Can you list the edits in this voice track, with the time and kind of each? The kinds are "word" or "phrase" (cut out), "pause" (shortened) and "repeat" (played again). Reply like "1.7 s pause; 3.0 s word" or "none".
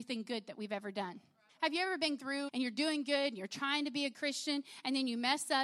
1.5 s pause; 2.2 s word; 2.5 s word; 4.1 s word